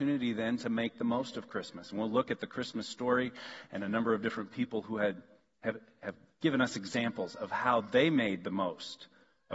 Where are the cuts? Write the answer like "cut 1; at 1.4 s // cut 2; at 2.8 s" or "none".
none